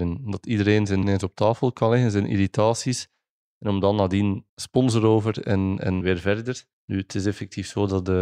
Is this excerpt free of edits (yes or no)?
no